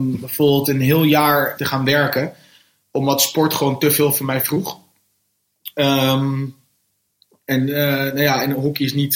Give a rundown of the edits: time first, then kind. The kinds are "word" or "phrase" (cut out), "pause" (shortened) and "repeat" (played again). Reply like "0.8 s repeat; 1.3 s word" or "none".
1.6 s word